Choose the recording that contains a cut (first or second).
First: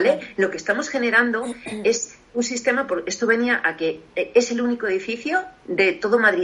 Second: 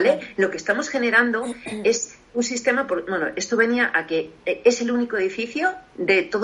first